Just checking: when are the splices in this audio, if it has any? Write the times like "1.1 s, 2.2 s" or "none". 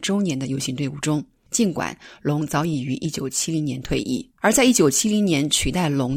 4.3 s